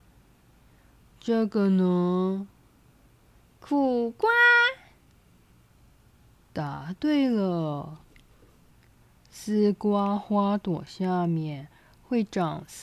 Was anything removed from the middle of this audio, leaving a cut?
no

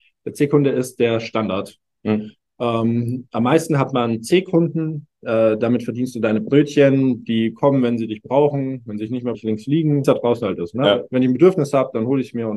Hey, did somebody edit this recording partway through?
yes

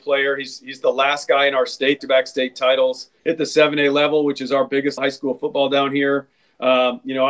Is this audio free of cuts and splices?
no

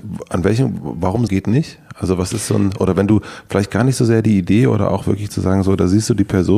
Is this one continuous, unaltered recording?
no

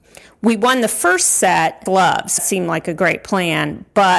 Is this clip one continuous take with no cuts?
no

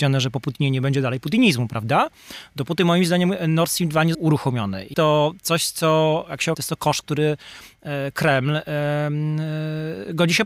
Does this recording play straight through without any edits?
no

